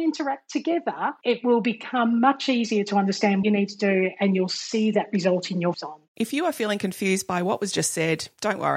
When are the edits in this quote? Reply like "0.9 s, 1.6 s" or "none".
3.4 s, 5.7 s, 6.1 s